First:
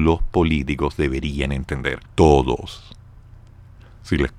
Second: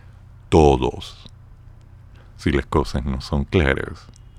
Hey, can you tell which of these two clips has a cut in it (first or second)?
first